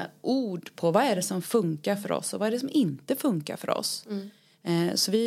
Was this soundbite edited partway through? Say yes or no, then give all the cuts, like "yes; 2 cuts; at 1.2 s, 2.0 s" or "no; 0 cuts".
no; 0 cuts